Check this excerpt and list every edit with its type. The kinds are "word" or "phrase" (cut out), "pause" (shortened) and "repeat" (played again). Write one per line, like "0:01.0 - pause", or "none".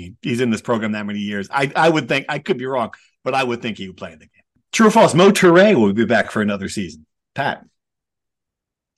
none